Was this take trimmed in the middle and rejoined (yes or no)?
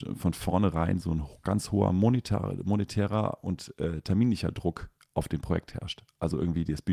no